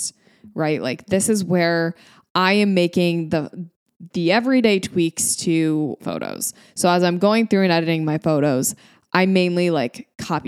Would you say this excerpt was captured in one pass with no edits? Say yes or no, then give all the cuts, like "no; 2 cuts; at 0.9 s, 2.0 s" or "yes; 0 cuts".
no; 1 cut; at 6.0 s